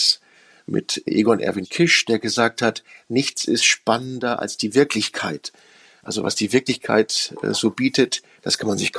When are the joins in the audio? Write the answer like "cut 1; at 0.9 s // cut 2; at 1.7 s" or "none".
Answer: none